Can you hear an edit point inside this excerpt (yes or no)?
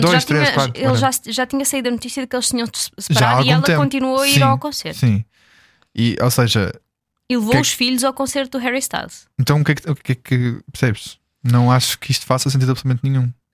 no